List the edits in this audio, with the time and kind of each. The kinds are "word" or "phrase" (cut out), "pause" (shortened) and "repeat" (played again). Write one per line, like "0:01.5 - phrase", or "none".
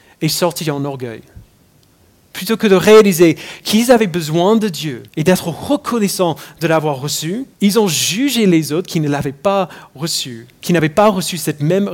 0:05.1 - pause
0:07.5 - pause